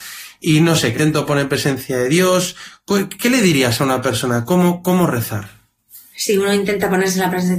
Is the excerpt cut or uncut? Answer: cut